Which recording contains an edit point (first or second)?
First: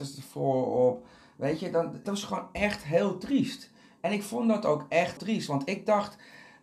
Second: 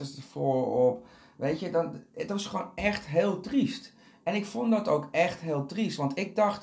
first